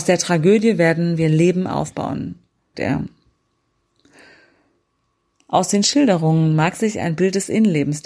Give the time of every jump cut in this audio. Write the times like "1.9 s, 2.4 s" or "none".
2.7 s